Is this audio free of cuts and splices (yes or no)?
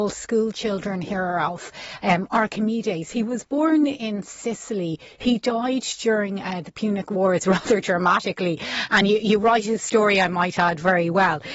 yes